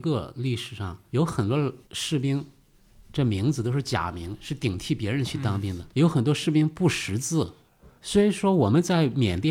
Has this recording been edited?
yes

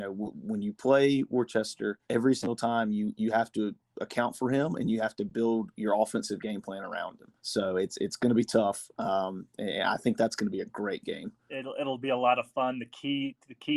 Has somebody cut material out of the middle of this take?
yes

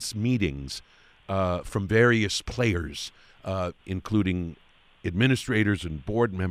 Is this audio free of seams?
yes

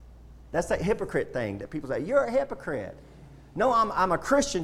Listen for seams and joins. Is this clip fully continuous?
yes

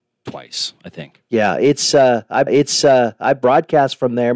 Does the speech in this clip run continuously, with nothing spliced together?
no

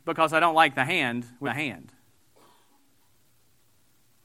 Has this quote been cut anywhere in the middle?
yes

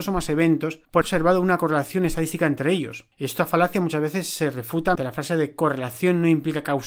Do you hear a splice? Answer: yes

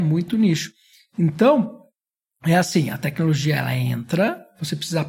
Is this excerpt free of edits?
yes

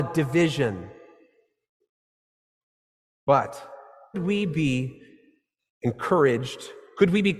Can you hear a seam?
yes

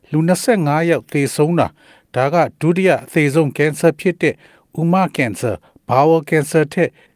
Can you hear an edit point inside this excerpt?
no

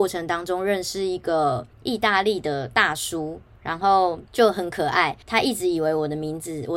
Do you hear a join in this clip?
yes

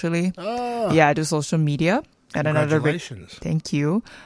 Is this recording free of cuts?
yes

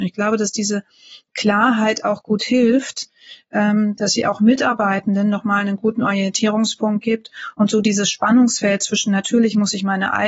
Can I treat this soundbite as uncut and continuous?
yes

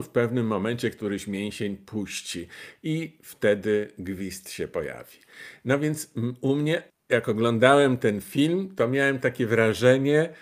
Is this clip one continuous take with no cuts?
no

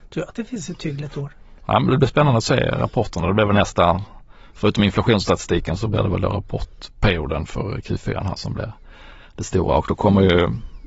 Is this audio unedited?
yes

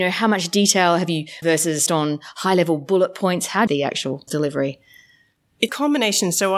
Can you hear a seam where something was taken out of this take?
yes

